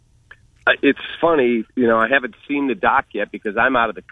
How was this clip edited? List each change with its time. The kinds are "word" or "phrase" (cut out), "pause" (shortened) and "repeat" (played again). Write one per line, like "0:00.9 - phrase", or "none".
0:01.2 - word